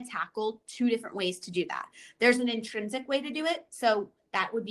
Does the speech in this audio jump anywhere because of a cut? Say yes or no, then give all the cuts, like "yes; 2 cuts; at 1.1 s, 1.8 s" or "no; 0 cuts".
no; 0 cuts